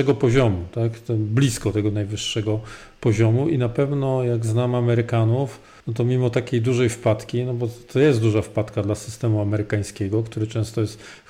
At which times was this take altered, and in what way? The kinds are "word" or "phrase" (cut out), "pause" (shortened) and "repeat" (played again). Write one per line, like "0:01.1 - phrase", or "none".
0:05.8 - pause